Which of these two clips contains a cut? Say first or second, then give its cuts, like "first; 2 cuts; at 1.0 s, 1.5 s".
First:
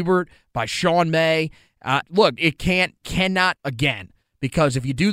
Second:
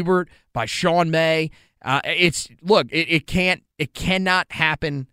first; 4 cuts; at 2.0 s, 2.4 s, 3.0 s, 3.6 s